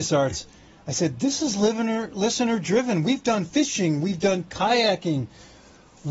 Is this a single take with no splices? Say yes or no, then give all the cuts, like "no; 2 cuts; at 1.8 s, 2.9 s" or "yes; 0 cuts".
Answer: yes; 0 cuts